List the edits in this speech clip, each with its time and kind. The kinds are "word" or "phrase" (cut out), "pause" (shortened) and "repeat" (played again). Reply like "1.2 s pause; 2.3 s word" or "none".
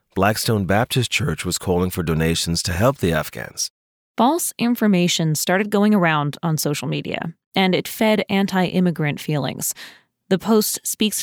none